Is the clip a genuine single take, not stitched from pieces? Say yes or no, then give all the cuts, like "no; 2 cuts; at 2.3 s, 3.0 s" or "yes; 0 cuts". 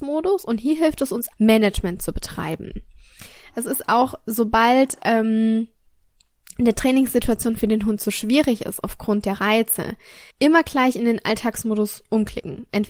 no; 2 cuts; at 1.3 s, 10.3 s